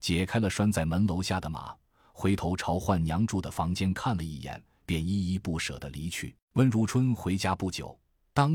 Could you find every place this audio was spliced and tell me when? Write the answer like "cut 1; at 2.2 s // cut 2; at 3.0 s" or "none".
cut 1; at 6.4 s